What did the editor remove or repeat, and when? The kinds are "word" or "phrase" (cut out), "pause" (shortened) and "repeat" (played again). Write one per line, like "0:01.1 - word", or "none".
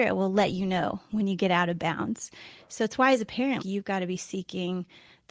0:03.6 - word